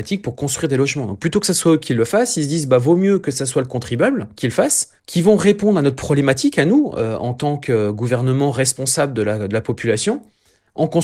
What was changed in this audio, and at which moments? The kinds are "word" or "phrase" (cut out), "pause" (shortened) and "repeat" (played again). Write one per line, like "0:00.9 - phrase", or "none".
0:05.0 - pause